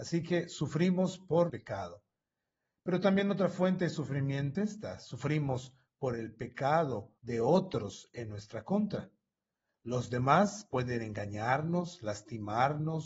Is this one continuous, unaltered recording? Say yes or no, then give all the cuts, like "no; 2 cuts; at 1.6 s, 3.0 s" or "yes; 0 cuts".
no; 3 cuts; at 1.5 s, 4.5 s, 7.2 s